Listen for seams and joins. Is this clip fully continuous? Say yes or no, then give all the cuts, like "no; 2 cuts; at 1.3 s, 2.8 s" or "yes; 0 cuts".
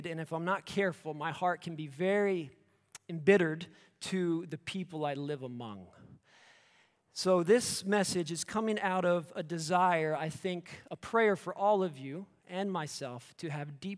yes; 0 cuts